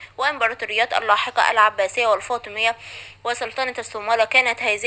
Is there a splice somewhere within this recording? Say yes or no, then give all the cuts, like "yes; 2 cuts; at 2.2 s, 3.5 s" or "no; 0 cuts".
no; 0 cuts